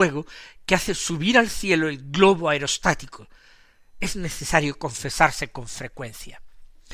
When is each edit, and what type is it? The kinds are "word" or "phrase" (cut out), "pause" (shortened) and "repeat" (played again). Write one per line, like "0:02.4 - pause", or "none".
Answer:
none